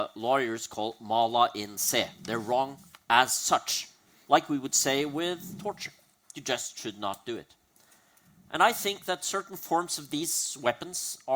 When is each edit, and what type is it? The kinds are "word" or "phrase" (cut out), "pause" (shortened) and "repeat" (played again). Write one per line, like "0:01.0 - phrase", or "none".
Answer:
0:04.1 - pause